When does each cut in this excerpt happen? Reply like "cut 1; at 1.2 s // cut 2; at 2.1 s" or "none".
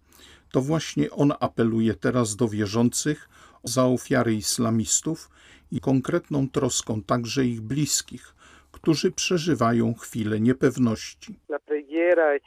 cut 1; at 3.7 s // cut 2; at 5.8 s